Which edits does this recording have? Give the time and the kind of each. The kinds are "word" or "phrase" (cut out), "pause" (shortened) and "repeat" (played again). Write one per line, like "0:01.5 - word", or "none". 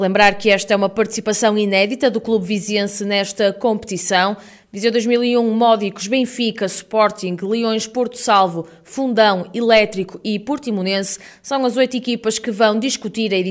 none

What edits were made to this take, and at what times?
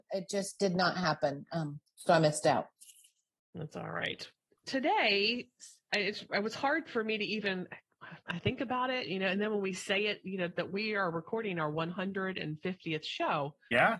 none

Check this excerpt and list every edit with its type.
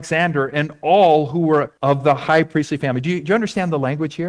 0:01.8 - pause

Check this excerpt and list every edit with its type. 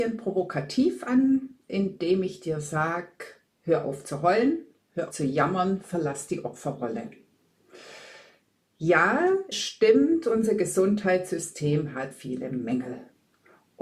0:03.5 - pause
0:05.1 - word
0:09.5 - word
0:12.1 - word

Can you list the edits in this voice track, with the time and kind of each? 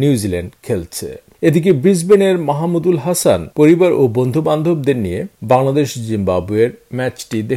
none

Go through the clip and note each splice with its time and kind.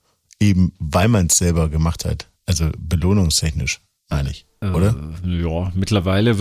none

